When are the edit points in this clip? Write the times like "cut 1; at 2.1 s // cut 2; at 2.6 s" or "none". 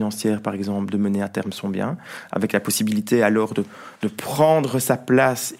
cut 1; at 4.0 s